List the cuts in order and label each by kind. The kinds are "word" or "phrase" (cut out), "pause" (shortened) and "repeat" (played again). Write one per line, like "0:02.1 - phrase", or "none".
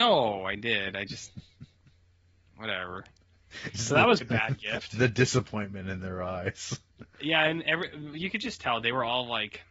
0:04.2 - word